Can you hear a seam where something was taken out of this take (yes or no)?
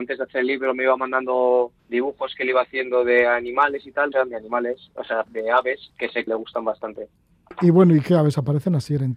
yes